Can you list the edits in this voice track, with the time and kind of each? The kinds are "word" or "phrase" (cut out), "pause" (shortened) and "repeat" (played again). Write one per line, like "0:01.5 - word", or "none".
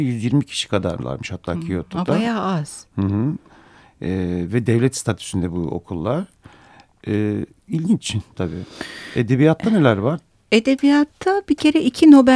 none